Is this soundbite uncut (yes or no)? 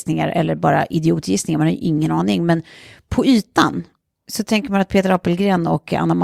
yes